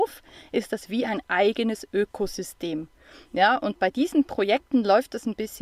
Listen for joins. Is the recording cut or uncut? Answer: uncut